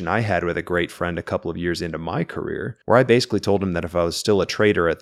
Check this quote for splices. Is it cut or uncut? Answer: cut